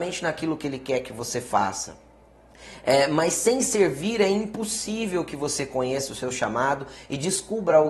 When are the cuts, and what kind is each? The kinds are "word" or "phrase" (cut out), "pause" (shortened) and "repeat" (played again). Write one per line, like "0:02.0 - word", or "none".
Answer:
none